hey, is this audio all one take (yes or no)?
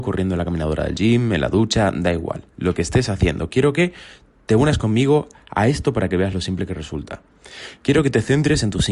yes